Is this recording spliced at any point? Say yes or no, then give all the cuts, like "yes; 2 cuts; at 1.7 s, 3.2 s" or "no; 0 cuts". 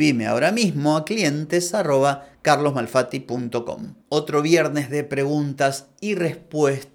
no; 0 cuts